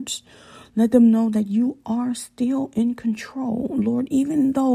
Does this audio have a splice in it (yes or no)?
no